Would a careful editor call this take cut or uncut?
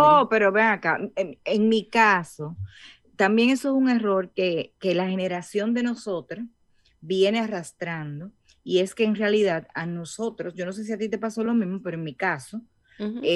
uncut